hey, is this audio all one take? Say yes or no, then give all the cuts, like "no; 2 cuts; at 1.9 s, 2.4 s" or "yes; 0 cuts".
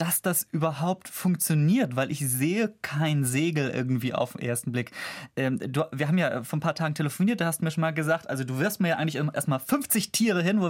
yes; 0 cuts